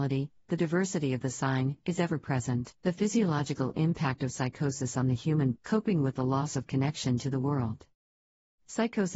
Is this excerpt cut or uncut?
cut